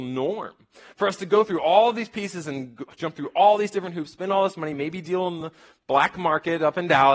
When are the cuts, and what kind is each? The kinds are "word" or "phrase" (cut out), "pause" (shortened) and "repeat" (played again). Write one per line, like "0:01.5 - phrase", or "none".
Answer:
none